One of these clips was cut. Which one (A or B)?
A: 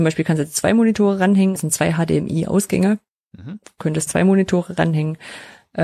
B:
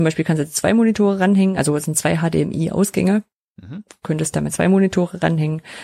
A